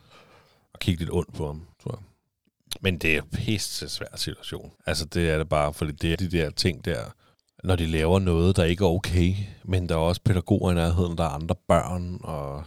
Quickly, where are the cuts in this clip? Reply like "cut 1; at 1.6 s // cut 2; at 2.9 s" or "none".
cut 1; at 1.7 s // cut 2; at 4.8 s // cut 3; at 6.1 s // cut 4; at 7.3 s